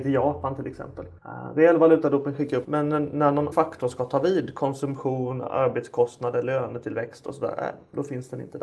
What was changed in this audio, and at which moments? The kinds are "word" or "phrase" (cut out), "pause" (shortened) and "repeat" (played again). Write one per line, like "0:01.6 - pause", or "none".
0:01.2 - pause
0:02.6 - word
0:03.5 - word